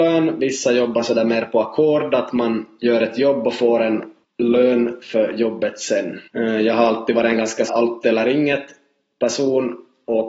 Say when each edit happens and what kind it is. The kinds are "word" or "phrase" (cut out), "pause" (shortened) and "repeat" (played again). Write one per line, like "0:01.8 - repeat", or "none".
0:04.2 - pause
0:06.3 - pause
0:07.7 - word